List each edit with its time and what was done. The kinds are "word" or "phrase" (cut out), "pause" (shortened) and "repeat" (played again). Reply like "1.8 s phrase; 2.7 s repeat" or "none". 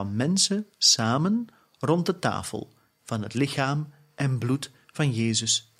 none